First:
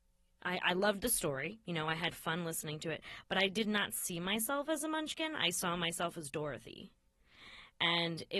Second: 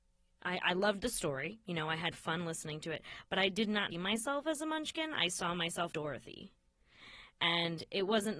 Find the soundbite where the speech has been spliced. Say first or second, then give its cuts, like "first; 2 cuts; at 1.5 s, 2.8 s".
second; 2 cuts; at 3.9 s, 5.9 s